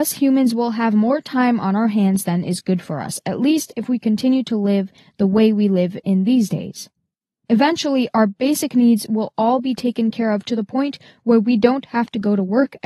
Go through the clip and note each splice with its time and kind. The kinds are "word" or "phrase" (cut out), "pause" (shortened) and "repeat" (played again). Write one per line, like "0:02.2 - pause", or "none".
none